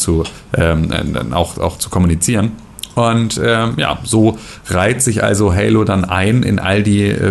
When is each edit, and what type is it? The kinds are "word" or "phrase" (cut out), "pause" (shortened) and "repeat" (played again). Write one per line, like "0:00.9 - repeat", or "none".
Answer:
none